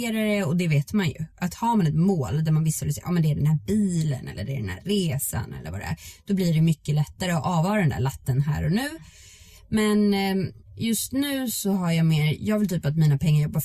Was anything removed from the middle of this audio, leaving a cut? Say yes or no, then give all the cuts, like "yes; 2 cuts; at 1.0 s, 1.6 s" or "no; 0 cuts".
yes; 1 cut; at 10.6 s